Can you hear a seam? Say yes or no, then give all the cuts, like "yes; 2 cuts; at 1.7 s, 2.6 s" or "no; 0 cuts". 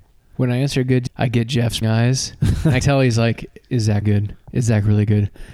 yes; 5 cuts; at 1.1 s, 1.8 s, 2.8 s, 3.6 s, 4.0 s